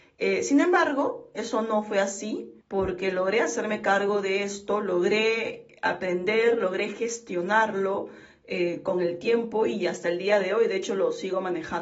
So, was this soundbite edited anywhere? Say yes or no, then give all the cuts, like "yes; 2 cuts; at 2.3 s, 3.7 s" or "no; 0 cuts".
yes; 1 cut; at 2.6 s